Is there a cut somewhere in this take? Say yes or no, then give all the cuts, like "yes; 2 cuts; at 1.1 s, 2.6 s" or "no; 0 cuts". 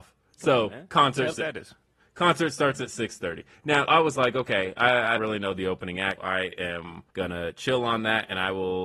yes; 5 cuts; at 1.3 s, 3.9 s, 5.2 s, 6.2 s, 7.1 s